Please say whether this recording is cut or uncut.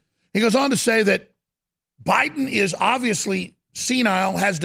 uncut